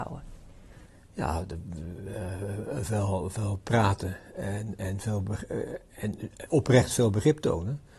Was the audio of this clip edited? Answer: no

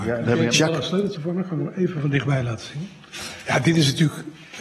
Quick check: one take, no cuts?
no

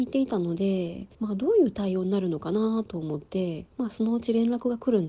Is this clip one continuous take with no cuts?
no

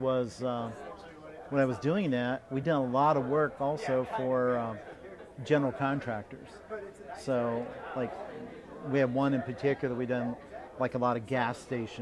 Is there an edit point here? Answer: no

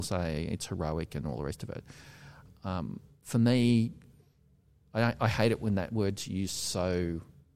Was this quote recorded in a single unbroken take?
yes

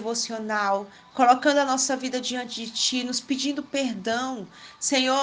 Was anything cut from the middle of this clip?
no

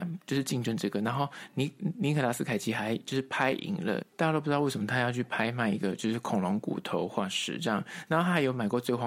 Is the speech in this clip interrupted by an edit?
yes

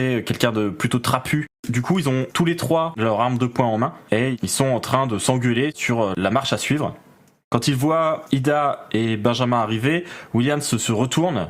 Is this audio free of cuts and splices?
yes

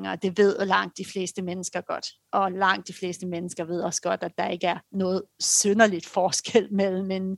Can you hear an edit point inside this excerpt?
yes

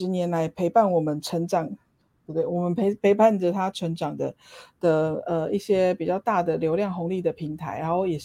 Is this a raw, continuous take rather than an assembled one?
yes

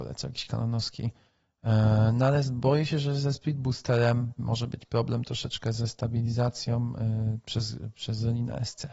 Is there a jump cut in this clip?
yes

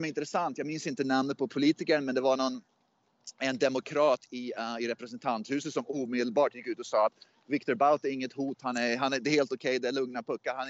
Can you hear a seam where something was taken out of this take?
no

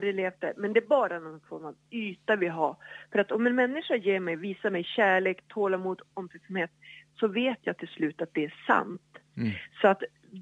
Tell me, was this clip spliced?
no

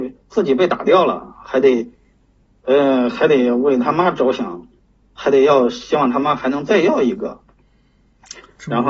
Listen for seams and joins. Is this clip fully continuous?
yes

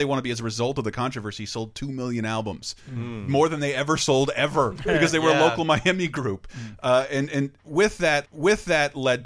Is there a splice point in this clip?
yes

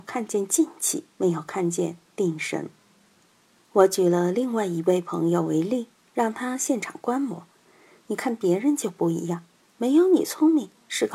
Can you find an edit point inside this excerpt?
yes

